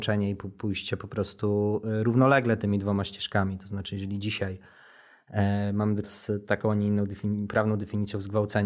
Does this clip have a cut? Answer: yes; 1 cut; at 6.0 s

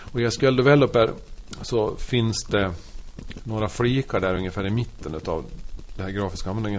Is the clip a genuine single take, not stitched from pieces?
yes; 0 cuts

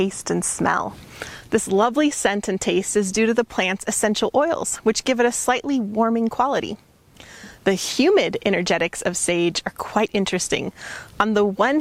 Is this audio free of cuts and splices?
yes; 0 cuts

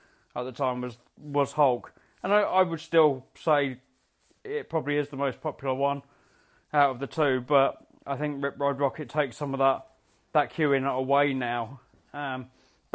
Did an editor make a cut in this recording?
no; 0 cuts

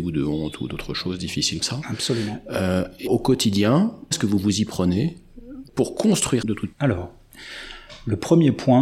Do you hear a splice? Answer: yes; 6 cuts; at 1.6 s, 3.1 s, 4.1 s, 5.7 s, 6.4 s, 6.7 s

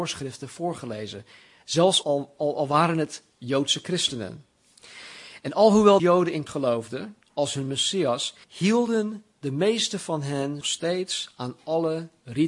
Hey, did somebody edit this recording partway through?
yes; 6 cuts; at 2.0 s, 6.0 s, 6.5 s, 7.2 s, 8.4 s, 10.6 s

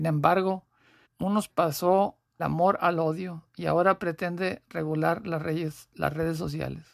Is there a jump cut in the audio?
yes; 3 cuts; at 1.0 s, 1.5 s, 2.4 s

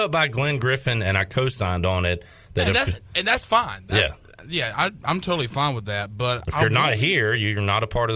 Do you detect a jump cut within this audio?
no; 0 cuts

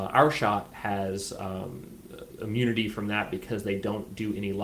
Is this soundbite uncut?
yes; 0 cuts

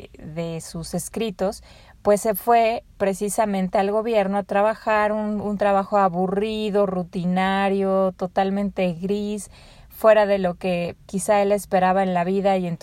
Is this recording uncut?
no; 1 cut; at 11.1 s

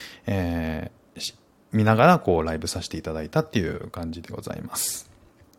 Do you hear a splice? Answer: no; 0 cuts

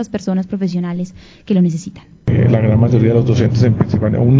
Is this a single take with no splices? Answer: yes; 0 cuts

